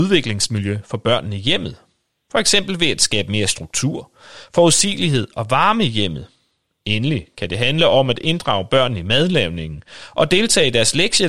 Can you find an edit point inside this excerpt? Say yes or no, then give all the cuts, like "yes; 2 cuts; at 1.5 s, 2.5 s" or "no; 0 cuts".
no; 0 cuts